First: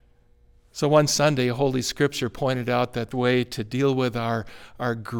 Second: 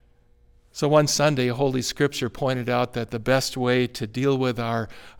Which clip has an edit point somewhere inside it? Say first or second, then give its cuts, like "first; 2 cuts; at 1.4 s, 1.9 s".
first; 1 cut; at 3.1 s